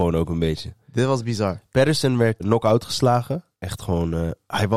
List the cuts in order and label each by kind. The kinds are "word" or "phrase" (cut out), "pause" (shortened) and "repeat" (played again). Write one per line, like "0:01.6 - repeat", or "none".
0:02.4 - word
0:03.5 - pause